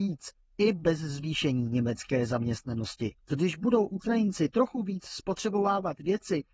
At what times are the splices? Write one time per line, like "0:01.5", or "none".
0:03.2